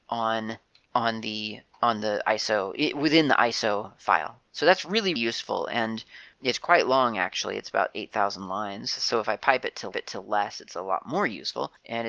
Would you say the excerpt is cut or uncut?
cut